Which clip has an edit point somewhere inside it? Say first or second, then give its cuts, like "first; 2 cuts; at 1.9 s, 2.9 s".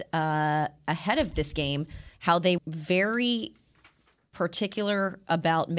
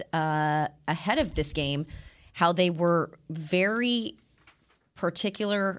first; 2 cuts; at 2.1 s, 2.6 s